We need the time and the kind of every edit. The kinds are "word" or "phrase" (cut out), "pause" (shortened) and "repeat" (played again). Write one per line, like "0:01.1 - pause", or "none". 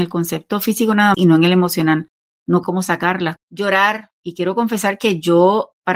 0:01.1 - word
0:02.6 - phrase
0:03.4 - word